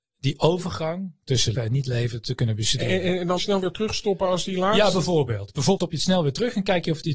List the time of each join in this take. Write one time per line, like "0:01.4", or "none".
0:01.5
0:03.4
0:05.8